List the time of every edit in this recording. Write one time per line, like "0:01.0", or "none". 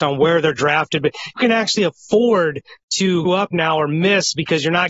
0:01.4
0:03.3